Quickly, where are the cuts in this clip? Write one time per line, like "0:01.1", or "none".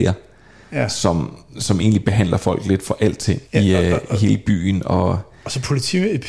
0:03.5